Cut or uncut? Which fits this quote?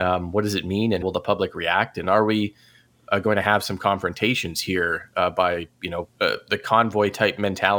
cut